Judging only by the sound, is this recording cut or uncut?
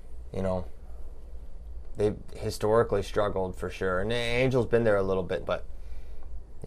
cut